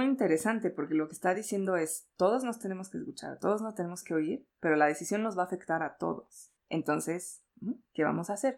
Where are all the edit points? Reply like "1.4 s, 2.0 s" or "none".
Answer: none